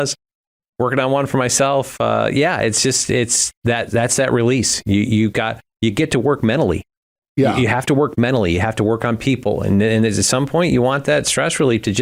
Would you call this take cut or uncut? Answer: uncut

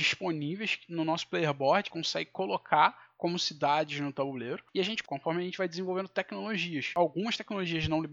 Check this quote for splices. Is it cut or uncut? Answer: cut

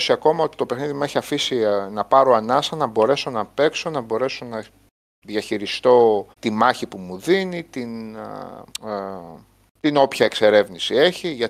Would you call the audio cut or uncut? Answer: cut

